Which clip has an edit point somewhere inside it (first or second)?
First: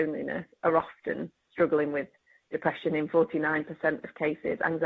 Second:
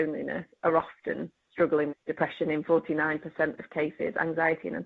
second